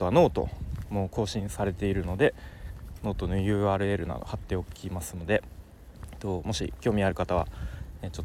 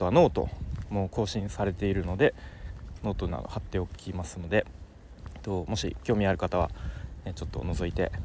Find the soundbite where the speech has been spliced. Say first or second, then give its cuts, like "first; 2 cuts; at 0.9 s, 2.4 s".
second; 1 cut; at 3.3 s